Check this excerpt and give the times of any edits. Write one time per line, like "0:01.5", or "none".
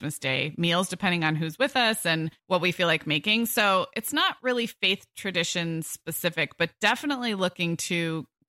0:02.4